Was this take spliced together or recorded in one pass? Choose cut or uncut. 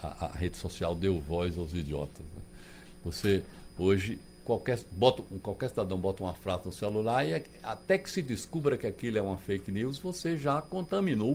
uncut